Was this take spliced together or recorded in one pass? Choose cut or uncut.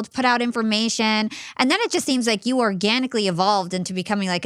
uncut